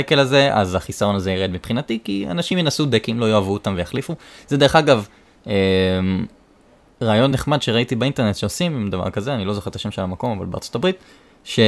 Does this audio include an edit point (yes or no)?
no